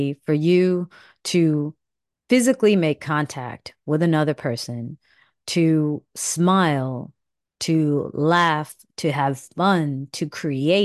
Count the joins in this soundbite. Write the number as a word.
zero